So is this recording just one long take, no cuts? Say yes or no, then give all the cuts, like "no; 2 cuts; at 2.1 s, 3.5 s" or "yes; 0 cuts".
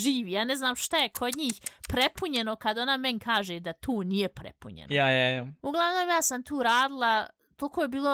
yes; 0 cuts